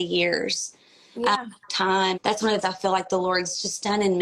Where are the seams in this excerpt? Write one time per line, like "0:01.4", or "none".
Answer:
0:01.7
0:02.1
0:02.6

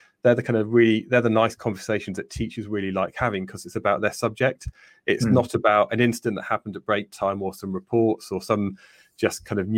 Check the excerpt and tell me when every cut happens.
none

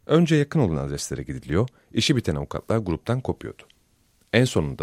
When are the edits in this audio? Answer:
none

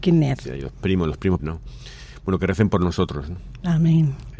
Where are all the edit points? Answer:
0:01.4

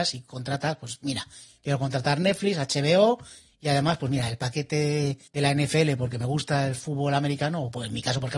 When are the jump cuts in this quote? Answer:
0:05.3

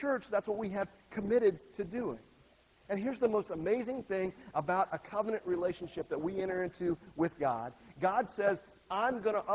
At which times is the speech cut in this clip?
none

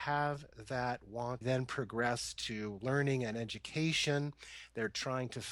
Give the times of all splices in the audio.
0:01.4

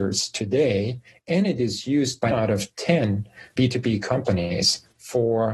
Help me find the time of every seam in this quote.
0:02.3
0:03.6

